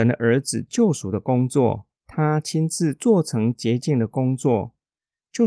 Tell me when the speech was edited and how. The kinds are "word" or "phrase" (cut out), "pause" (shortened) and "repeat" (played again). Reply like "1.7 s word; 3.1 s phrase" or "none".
1.9 s pause